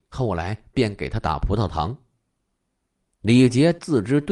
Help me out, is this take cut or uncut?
uncut